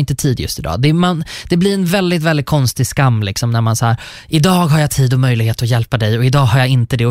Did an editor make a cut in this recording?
no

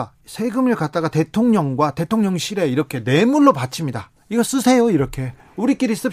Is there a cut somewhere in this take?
no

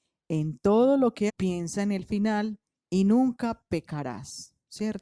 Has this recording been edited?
yes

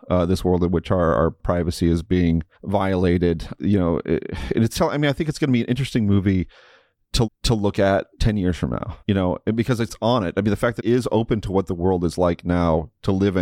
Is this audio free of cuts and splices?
no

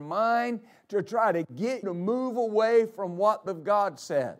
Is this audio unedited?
no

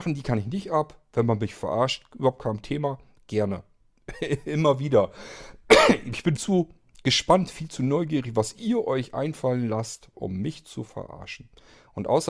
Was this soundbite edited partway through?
yes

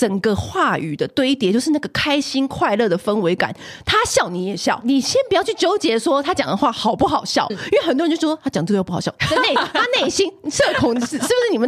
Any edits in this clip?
yes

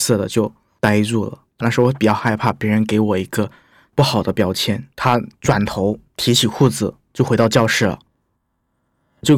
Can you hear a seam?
yes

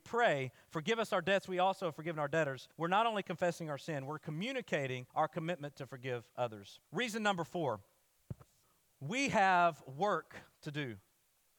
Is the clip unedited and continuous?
no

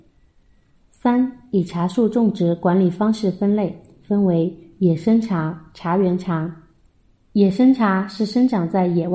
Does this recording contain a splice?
no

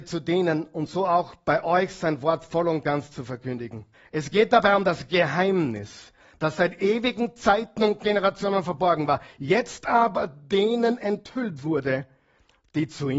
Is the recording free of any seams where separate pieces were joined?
no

